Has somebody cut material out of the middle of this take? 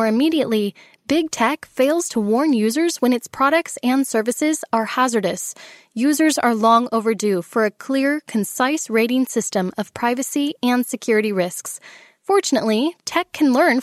no; 0 cuts

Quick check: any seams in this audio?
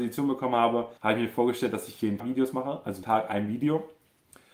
yes; 3 cuts; at 1.0 s, 2.2 s, 3.0 s

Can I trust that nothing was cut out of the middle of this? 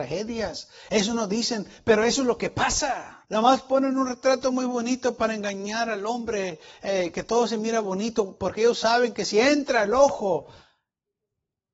no; 1 cut; at 3.2 s

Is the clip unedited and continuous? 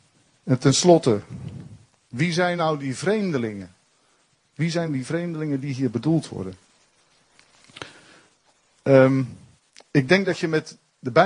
yes; 0 cuts

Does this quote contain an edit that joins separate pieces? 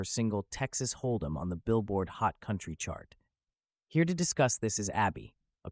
no; 0 cuts

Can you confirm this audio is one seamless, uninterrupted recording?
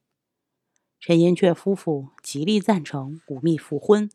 yes; 0 cuts

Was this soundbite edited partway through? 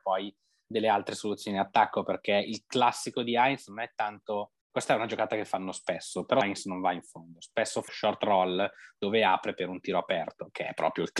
yes; 3 cuts; at 4.6 s, 6.4 s, 7.9 s

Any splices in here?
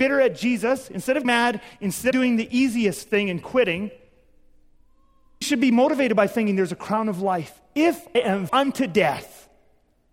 yes; 5 cuts; at 1.2 s, 2.1 s, 5.4 s, 8.1 s, 8.5 s

